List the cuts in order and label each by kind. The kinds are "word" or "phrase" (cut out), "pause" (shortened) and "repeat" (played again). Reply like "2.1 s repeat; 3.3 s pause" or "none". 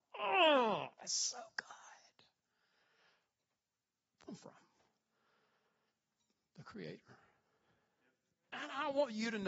0.9 s pause; 4.3 s phrase